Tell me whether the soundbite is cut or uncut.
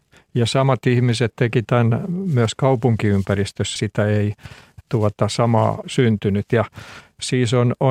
cut